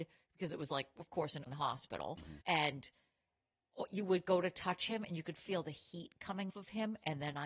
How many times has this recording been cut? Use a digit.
3